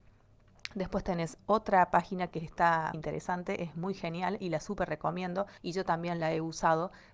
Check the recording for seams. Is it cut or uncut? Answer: cut